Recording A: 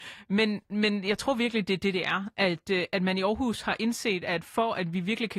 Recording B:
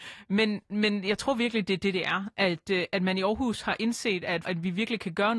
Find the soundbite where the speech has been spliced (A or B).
B